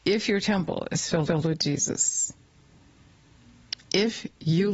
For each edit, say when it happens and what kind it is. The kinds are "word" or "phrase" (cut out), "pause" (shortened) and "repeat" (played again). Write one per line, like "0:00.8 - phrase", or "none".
0:01.3 - repeat
0:03.8 - pause